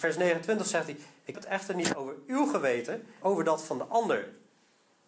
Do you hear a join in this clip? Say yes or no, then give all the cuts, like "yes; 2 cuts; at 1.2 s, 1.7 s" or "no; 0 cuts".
yes; 2 cuts; at 1.3 s, 3.2 s